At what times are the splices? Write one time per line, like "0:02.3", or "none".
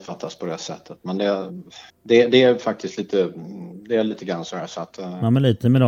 0:01.9